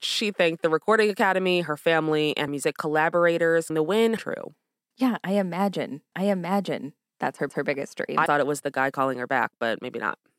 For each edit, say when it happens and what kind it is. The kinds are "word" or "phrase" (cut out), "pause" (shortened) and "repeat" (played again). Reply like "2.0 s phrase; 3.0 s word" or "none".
2.5 s word; 3.7 s word; 4.2 s phrase; 6.1 s repeat; 7.5 s repeat; 8.3 s word